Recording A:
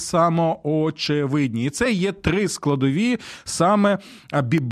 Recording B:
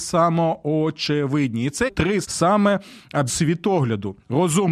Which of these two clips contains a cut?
B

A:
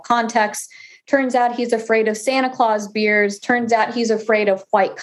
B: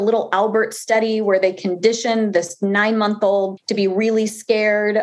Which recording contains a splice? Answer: B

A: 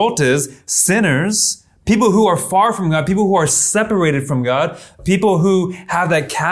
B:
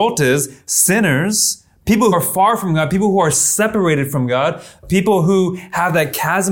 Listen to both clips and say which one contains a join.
B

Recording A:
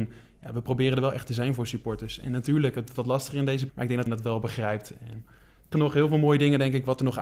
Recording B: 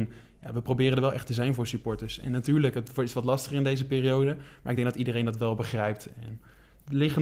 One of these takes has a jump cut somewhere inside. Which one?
A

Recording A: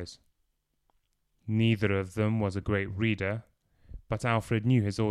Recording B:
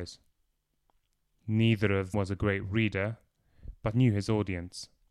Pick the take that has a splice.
B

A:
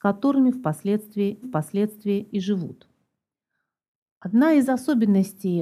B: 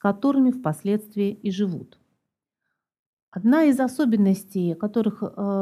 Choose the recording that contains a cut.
A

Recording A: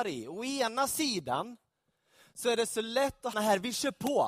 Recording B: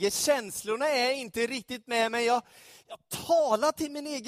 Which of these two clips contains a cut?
A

